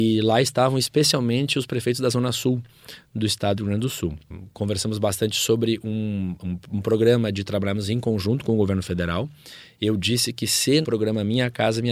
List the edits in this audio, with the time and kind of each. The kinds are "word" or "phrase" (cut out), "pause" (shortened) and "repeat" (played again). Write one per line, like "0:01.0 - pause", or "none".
0:10.8 - word